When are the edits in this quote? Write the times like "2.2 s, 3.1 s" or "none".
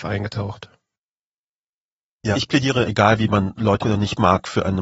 2.3 s, 2.8 s, 3.8 s